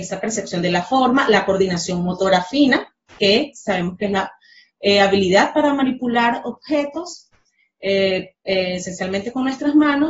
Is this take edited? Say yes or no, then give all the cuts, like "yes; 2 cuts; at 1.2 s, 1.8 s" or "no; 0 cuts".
no; 0 cuts